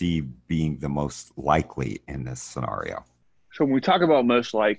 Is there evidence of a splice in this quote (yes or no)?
no